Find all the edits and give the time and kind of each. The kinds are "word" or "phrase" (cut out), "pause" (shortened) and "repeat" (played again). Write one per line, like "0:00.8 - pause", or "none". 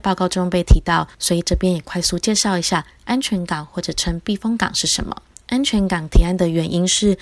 0:01.1 - pause